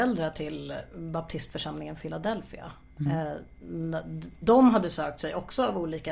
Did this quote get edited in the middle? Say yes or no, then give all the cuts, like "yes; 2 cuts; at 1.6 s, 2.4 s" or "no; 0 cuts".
yes; 1 cut; at 4.4 s